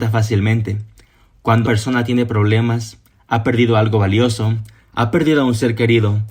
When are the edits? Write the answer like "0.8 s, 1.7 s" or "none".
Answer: 1.6 s